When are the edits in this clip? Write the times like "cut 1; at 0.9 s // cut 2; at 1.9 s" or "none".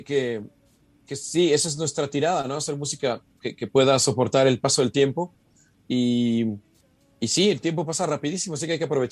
none